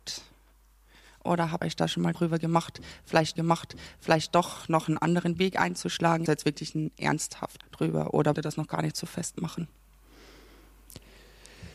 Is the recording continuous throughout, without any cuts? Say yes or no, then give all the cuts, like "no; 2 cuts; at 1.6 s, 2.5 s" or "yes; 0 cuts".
no; 6 cuts; at 1.6 s, 2.1 s, 3.4 s, 6.3 s, 7.6 s, 8.3 s